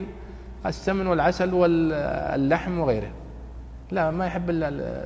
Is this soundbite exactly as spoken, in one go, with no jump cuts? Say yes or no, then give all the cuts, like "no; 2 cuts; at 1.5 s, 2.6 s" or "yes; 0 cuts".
yes; 0 cuts